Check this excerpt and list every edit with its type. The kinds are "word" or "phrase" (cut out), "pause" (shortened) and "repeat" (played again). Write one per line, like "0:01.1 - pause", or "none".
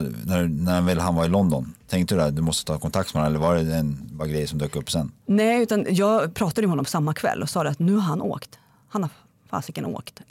none